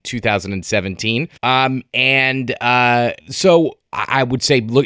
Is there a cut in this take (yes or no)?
yes